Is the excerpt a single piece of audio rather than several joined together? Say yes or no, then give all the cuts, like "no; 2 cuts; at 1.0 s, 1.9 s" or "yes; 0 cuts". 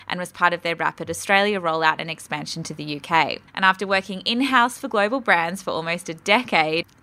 no; 1 cut; at 3.5 s